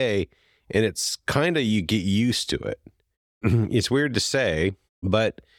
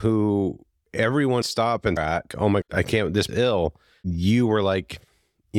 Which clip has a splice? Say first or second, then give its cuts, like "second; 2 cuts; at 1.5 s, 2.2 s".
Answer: second; 5 cuts; at 1.4 s, 2.0 s, 2.3 s, 2.6 s, 3.3 s